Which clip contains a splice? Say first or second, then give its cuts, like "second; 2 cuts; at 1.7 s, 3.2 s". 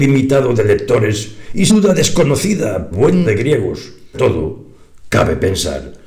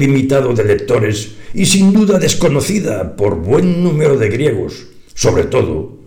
first; 4 cuts; at 1.7 s, 2.9 s, 3.2 s, 4.1 s